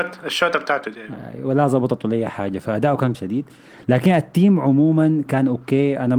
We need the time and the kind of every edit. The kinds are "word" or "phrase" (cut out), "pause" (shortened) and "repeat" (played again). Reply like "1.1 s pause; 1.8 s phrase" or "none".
3.1 s word; 5.3 s word